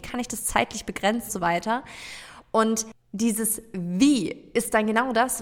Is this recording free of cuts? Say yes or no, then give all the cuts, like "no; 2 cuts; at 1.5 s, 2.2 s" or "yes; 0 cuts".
no; 1 cut; at 1.3 s